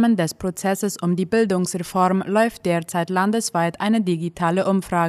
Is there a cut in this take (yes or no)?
no